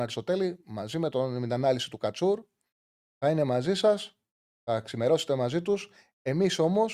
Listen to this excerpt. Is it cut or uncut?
uncut